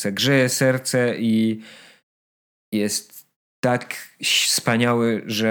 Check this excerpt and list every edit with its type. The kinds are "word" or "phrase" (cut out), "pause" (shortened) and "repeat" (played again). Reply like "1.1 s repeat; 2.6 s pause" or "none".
none